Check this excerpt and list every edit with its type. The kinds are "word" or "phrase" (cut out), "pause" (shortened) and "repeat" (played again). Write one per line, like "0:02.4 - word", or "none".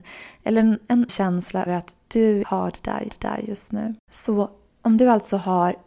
0:01.1 - word
0:01.7 - word
0:02.4 - word
0:03.1 - repeat
0:04.0 - pause